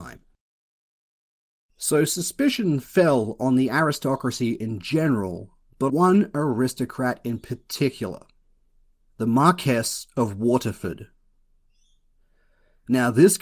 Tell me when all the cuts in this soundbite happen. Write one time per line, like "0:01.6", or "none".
0:05.9